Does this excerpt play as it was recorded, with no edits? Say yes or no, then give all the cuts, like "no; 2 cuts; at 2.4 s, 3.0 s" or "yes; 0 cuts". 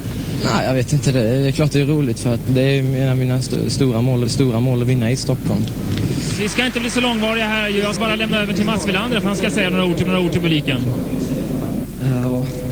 no; 4 cuts; at 2.5 s, 4.3 s, 8.0 s, 10.1 s